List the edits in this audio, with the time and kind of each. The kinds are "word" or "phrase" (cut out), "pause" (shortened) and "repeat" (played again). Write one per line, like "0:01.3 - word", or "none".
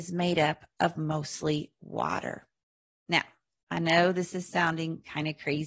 none